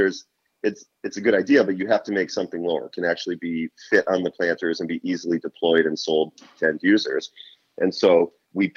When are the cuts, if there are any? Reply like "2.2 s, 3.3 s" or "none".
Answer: 2.9 s